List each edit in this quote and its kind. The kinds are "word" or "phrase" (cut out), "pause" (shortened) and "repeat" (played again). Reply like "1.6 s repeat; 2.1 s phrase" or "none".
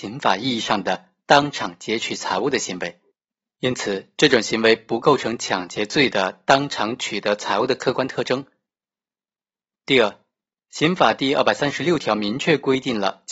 none